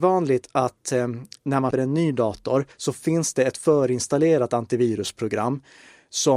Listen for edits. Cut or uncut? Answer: cut